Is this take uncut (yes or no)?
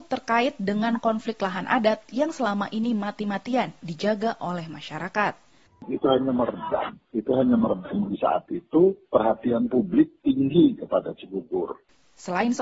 no